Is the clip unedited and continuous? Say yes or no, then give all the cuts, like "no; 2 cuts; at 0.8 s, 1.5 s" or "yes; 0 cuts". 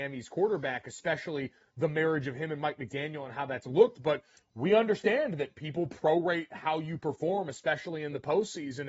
yes; 0 cuts